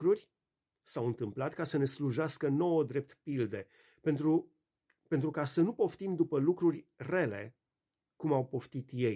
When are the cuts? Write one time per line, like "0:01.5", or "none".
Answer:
none